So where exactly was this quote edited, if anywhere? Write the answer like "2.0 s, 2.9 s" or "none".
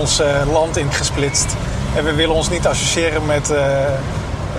0.9 s